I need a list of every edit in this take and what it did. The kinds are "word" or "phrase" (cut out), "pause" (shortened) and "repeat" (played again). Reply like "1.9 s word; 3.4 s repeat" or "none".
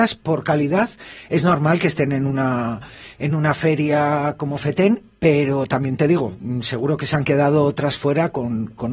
none